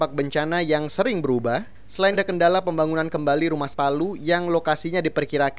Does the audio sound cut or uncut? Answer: cut